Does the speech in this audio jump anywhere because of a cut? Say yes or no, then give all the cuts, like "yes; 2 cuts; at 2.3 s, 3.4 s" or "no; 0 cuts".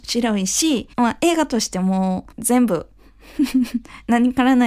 yes; 2 cuts; at 0.9 s, 2.3 s